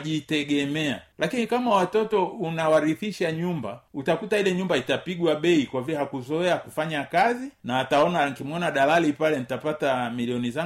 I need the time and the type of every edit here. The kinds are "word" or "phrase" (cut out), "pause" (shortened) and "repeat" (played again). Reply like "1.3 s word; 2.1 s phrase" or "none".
none